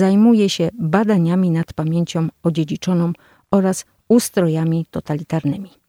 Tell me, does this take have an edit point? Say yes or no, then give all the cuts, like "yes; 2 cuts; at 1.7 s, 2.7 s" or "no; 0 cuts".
no; 0 cuts